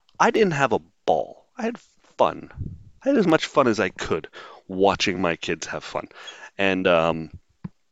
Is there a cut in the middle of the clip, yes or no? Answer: no